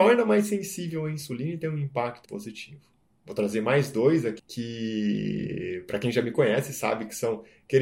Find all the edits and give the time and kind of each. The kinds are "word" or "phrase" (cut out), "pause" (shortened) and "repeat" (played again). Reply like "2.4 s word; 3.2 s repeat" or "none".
2.3 s word; 4.4 s phrase